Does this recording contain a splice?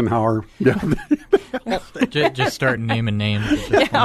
no; 0 cuts

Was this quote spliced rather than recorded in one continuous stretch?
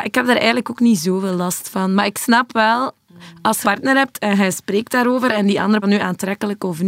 yes; 2 cuts; at 3.6 s, 5.8 s

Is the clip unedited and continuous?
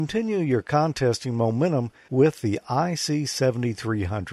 yes; 0 cuts

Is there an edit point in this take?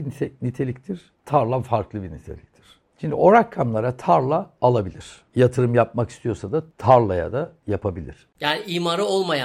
no; 0 cuts

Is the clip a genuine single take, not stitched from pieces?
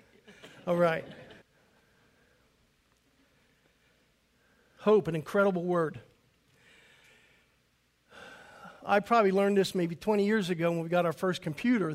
no; 1 cut; at 1.4 s

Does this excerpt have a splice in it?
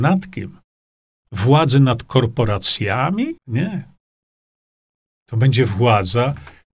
yes; 2 cuts; at 1.0 s, 3.4 s

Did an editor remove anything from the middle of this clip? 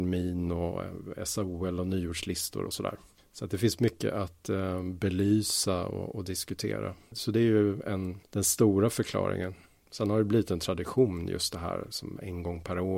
yes; 1 cut; at 2.6 s

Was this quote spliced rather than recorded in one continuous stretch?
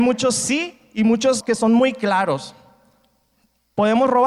yes; 1 cut; at 1.4 s

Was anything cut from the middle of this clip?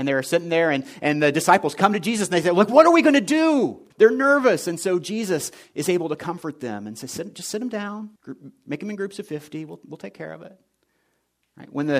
yes; 2 cuts; at 3.9 s, 8.2 s

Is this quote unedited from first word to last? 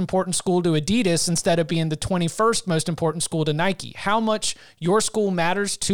yes; 0 cuts

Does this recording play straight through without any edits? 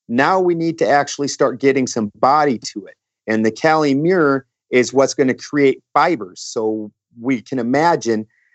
yes; 0 cuts

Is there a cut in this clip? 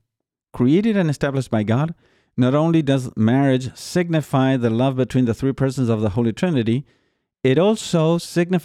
no; 0 cuts

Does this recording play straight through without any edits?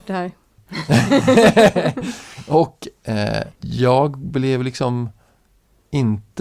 no; 1 cut; at 3.5 s

